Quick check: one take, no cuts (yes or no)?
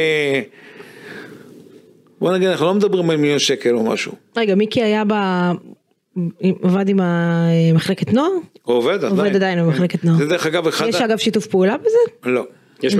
yes